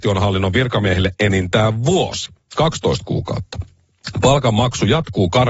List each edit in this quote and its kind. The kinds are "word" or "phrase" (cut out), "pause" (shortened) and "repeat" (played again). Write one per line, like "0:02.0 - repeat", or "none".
none

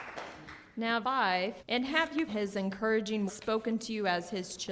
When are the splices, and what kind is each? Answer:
0:01.0 - word
0:01.6 - pause
0:02.3 - word
0:03.3 - word

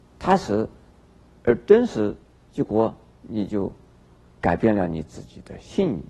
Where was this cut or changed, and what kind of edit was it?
0:02.3 - pause

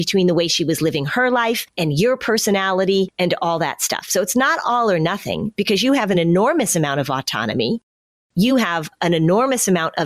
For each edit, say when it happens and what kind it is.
none

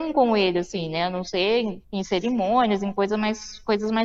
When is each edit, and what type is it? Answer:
0:01.8 - pause

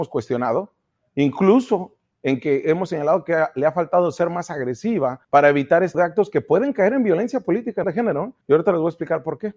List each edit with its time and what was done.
0:05.2 - pause
0:05.9 - word
0:07.8 - word
0:08.4 - pause

